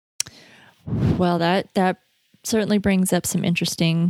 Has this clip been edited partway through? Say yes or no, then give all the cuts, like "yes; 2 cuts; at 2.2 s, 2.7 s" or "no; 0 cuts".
no; 0 cuts